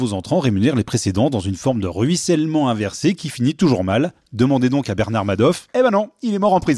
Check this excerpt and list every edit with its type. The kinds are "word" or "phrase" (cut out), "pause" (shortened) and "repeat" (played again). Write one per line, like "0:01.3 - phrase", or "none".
0:05.7 - pause